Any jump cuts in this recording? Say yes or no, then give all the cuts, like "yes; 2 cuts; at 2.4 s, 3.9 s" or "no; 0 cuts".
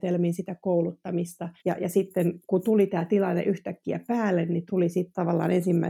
yes; 3 cuts; at 1.6 s, 2.4 s, 4.7 s